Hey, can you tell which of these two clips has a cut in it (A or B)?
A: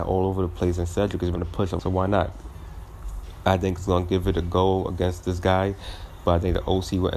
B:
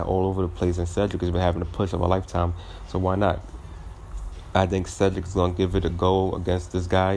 A